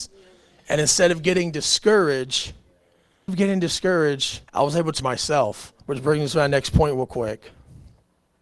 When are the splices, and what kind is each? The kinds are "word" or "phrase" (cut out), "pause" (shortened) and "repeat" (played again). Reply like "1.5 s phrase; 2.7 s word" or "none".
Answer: 3.3 s word; 4.5 s pause; 5.0 s word; 5.8 s pause